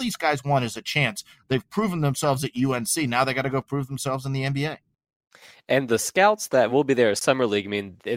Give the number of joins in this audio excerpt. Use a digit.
0